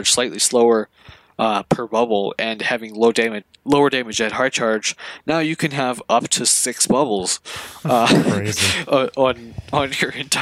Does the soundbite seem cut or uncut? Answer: uncut